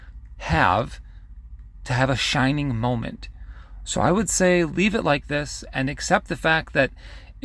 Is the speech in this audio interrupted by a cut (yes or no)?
no